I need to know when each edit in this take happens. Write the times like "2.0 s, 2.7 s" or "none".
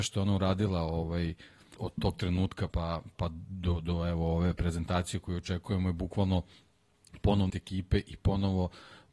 1.8 s, 2.7 s, 3.1 s, 7.5 s